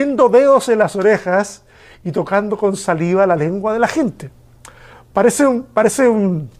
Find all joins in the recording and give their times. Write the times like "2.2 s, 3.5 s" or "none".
none